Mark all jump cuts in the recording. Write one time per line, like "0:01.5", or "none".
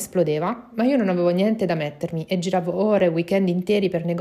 none

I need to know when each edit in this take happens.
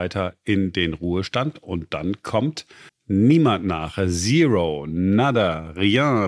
0:02.9

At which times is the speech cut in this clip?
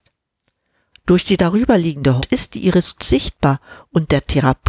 0:02.2
0:03.0

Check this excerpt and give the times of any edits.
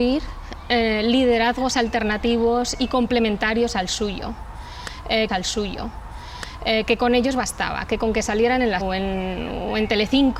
0:05.3
0:08.8

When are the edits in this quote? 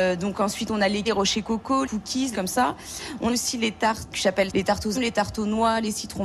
0:01.0
0:01.8
0:02.3
0:03.3
0:04.1
0:04.5
0:04.9

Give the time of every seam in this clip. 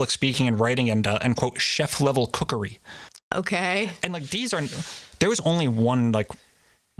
0:03.2

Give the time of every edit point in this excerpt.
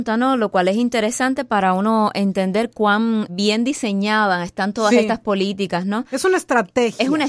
0:03.3

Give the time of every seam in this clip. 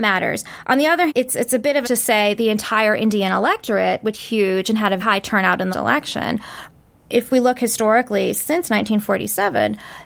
0:01.1
0:01.8
0:02.4
0:04.1
0:05.0
0:05.7
0:07.3

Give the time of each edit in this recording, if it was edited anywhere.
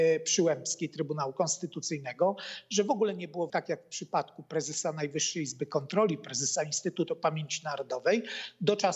0:03.5
0:06.6

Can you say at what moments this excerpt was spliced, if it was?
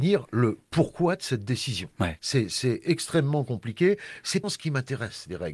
0:02.2
0:04.4

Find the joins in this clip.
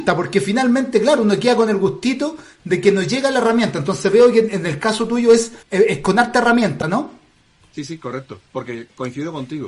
0:05.6
0:08.5

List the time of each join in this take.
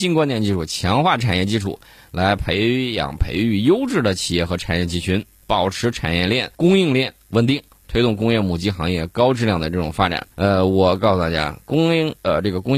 0:06.5
0:10.3

